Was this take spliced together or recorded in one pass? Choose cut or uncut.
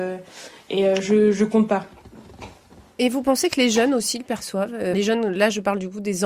cut